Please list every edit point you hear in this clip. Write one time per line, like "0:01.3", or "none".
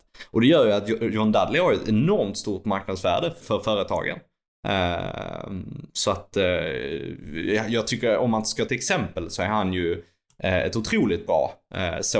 0:03.4
0:08.7